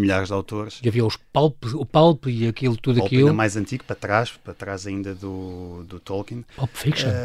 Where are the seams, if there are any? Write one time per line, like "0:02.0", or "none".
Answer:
0:05.9